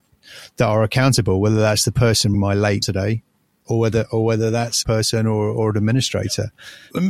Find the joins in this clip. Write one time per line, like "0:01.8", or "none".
0:02.3
0:02.8
0:04.8